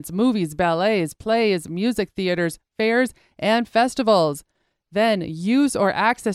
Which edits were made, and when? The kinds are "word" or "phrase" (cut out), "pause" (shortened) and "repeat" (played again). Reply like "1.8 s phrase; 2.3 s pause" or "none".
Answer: none